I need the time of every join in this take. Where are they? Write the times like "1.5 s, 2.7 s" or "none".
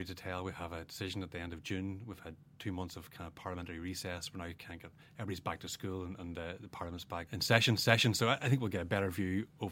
2.5 s, 7.3 s, 7.8 s